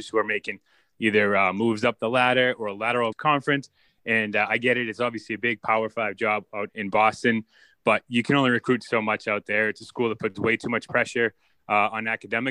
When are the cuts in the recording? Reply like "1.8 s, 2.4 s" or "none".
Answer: 3.1 s, 6.7 s